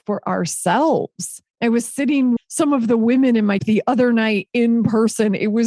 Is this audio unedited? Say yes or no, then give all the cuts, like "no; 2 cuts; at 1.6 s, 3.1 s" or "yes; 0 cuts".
no; 3 cuts; at 1.5 s, 2.4 s, 3.6 s